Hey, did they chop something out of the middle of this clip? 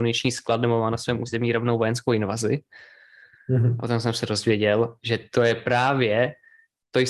no; 0 cuts

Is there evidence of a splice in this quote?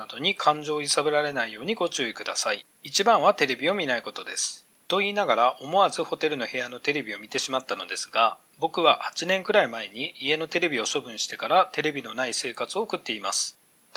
yes; 1 cut; at 2.7 s

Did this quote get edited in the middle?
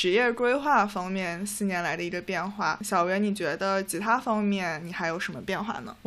no; 0 cuts

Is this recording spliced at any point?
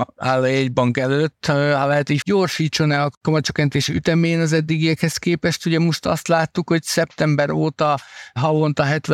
yes; 1 cut; at 2.2 s

